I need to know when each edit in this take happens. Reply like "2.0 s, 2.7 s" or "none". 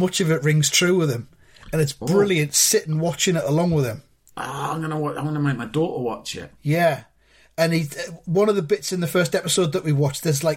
none